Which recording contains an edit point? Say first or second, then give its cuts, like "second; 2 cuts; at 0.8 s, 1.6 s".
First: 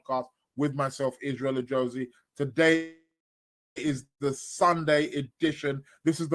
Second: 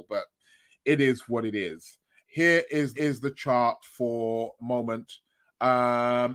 second; 3 cuts; at 2.3 s, 2.9 s, 4.6 s